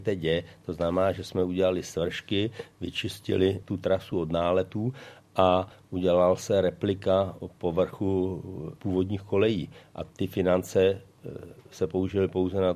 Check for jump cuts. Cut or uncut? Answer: uncut